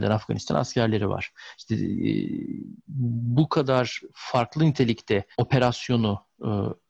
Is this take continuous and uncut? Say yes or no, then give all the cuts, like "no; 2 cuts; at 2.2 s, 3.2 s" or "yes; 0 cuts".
no; 1 cut; at 5.3 s